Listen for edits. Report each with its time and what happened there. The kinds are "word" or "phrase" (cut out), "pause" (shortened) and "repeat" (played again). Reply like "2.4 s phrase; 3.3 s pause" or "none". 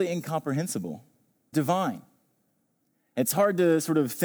1.5 s phrase